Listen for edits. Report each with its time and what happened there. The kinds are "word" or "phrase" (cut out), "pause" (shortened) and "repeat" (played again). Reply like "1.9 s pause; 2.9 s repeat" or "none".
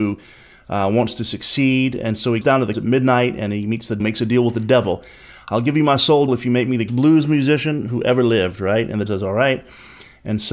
2.4 s word; 2.7 s word; 4.0 s word; 6.3 s word; 6.9 s word; 9.1 s word